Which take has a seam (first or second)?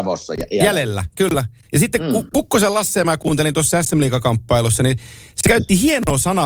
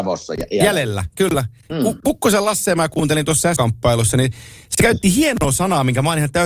second